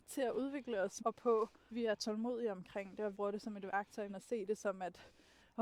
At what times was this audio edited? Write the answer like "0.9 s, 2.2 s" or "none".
1.0 s, 1.7 s, 3.1 s, 4.1 s